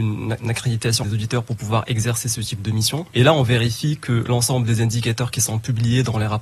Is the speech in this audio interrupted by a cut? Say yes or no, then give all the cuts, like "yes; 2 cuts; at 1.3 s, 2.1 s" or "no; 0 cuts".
yes; 1 cut; at 1.0 s